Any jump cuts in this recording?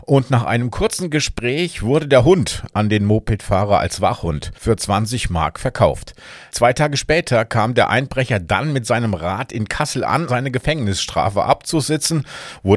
yes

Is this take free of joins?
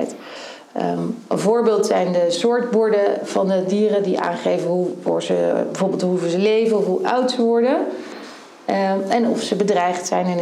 yes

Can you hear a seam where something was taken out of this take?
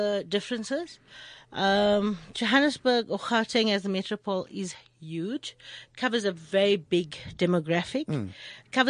no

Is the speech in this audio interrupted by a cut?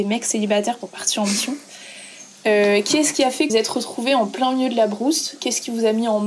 yes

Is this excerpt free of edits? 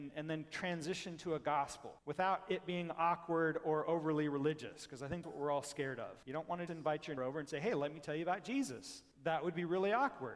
no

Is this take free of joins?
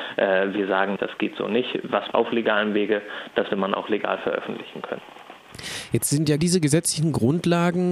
no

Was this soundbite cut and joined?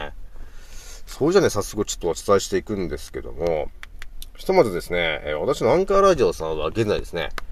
no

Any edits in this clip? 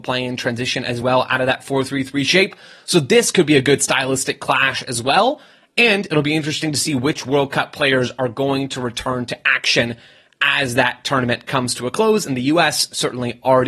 no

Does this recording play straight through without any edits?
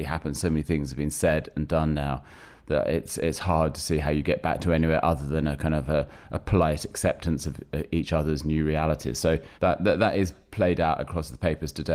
no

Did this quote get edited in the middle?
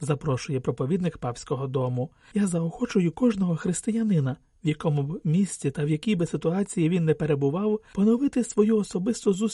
no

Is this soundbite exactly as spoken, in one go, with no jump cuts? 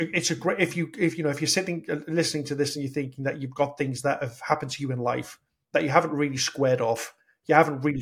yes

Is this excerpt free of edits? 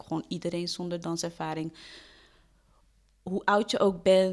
yes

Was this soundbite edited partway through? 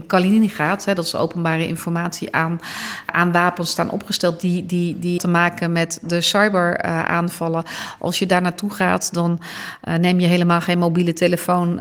yes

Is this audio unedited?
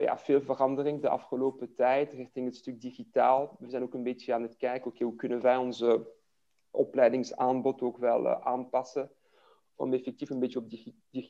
yes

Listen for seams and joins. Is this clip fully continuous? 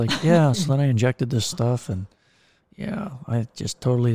yes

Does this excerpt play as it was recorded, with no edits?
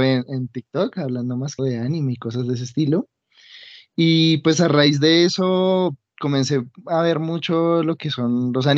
no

